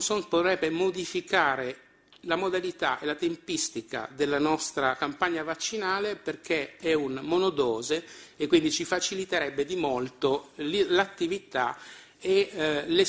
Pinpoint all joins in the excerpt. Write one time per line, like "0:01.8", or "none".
none